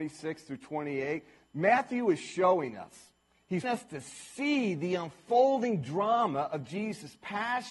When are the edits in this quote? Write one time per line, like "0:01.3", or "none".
0:03.6

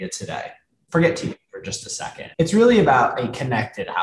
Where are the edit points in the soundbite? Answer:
0:02.3

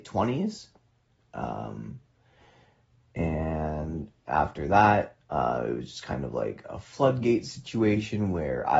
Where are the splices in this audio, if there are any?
none

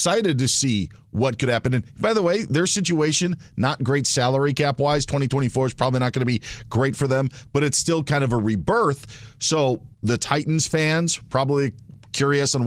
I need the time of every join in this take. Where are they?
0:09.9

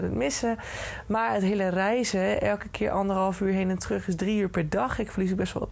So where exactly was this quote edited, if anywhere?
none

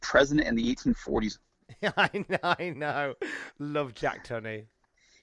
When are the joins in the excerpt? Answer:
none

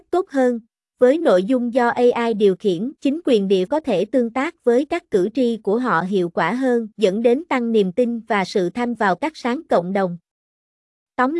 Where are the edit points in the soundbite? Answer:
0:03.0
0:03.7
0:06.9
0:08.9
0:09.7

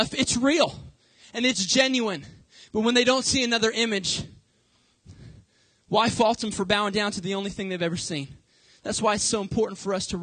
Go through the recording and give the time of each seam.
none

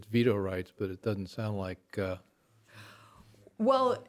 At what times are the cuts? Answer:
0:01.0

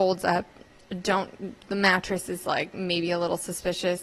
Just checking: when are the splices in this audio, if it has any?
none

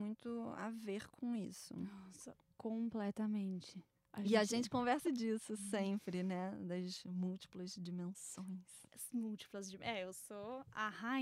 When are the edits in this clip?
0:04.0
0:05.0

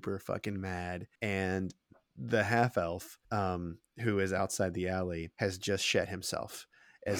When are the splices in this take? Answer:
0:01.2
0:03.2
0:05.3

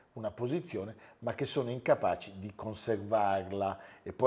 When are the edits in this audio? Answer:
none

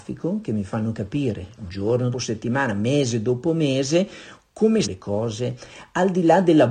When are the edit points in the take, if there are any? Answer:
0:02.1
0:04.8

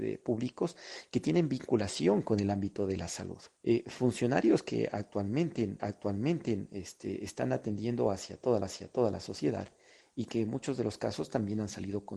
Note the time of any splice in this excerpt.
0:03.6
0:05.8
0:08.6

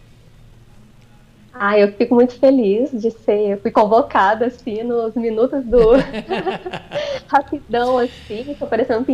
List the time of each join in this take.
none

